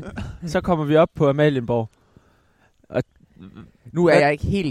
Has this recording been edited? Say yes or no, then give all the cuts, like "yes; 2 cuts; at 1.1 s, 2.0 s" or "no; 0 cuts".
no; 0 cuts